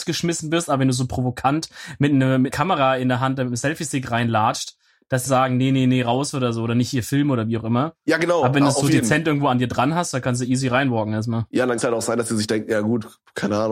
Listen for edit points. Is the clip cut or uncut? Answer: cut